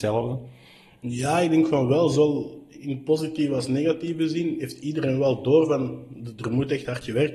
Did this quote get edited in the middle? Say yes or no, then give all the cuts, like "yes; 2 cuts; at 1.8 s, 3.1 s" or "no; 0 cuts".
no; 0 cuts